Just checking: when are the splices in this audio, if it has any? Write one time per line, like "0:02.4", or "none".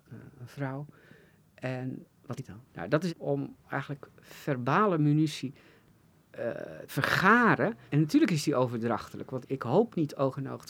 0:02.4
0:02.7
0:03.1
0:04.1
0:06.9
0:07.9
0:09.4